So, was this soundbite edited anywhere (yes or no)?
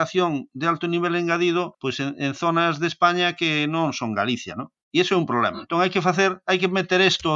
yes